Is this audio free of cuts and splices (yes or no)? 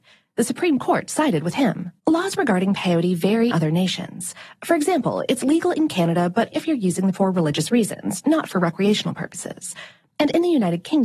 no